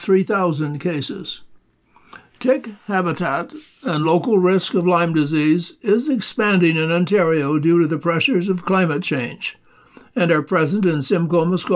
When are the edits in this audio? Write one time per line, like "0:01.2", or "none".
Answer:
none